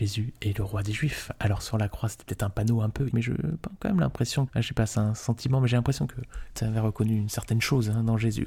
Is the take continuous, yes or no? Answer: no